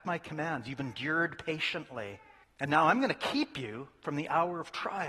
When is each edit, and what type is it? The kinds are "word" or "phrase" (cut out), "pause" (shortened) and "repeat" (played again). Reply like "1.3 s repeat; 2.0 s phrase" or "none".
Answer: 2.4 s pause